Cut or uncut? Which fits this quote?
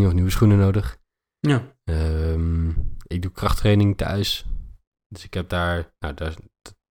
uncut